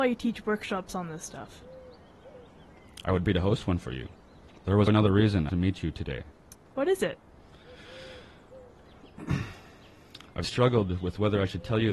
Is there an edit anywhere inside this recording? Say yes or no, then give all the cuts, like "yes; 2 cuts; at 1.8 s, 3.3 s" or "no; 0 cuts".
yes; 4 cuts; at 3.2 s, 4.9 s, 5.5 s, 10.4 s